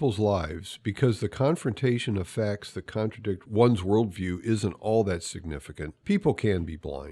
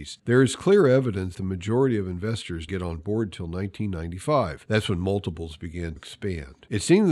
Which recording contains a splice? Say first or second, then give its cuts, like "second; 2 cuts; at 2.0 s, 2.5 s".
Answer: second; 3 cuts; at 1.3 s, 2.7 s, 6.0 s